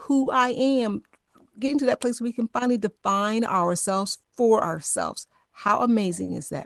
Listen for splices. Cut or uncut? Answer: uncut